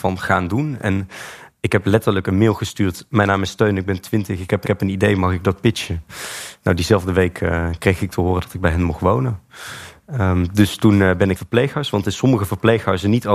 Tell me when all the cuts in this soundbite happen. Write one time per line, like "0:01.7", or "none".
0:04.6
0:11.4